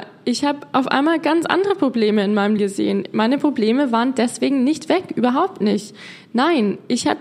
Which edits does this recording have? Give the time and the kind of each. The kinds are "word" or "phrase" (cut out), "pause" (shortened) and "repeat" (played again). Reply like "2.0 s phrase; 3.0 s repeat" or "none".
2.6 s word